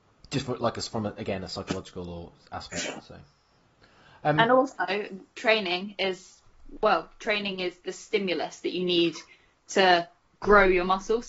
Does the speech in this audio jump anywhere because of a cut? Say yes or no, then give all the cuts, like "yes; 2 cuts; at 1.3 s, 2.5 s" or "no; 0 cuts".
no; 0 cuts